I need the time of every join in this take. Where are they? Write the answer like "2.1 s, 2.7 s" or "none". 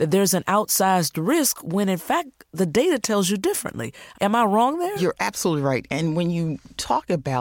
4.2 s